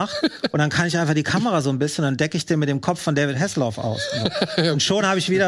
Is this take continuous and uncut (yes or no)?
yes